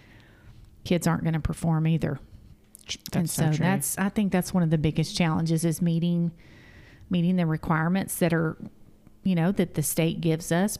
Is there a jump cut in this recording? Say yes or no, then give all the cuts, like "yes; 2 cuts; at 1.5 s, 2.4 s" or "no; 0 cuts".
no; 0 cuts